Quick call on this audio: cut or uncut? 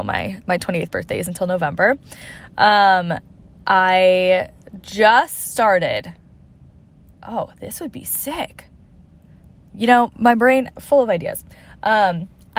uncut